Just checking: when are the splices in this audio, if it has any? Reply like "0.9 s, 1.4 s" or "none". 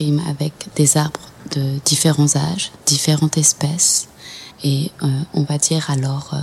2.8 s, 4.5 s